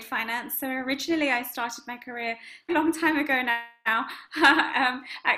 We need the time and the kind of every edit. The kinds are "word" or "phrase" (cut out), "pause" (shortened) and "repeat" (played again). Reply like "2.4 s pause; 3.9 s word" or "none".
2.7 s word